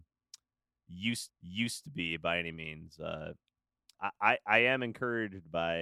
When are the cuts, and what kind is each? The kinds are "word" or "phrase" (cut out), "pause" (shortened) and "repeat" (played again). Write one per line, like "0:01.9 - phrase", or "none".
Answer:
0:01.3 - repeat
0:03.9 - word